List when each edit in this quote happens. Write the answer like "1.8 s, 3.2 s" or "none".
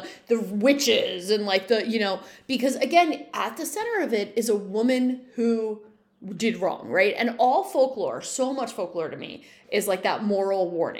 none